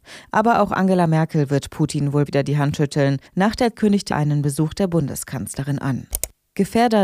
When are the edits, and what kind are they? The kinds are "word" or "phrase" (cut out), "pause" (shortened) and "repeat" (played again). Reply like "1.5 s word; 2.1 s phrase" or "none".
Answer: 2.3 s word; 3.3 s pause; 3.7 s word; 4.1 s word